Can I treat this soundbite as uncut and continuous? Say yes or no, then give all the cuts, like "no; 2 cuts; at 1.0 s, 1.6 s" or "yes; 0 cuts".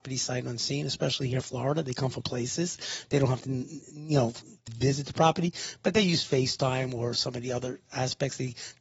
no; 4 cuts; at 1.4 s, 2.2 s, 3.4 s, 4.7 s